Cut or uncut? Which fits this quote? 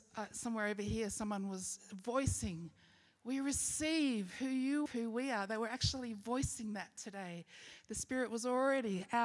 cut